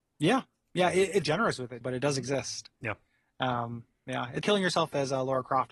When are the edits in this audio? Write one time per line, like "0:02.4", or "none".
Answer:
0:01.2
0:01.8
0:04.4